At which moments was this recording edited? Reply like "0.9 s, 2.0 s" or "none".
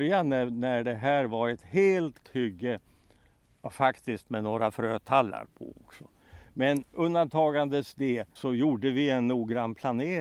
2.2 s, 8.4 s